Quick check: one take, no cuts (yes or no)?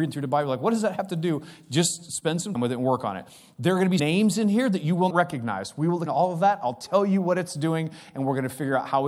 no